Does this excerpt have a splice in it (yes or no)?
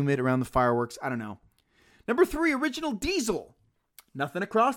no